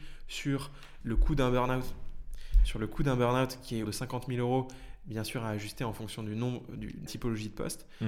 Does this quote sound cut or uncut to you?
cut